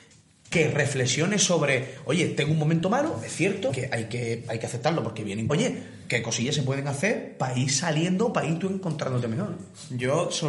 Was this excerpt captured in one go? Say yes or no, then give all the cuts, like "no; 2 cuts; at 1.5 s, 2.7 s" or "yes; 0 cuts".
no; 2 cuts; at 3.7 s, 5.5 s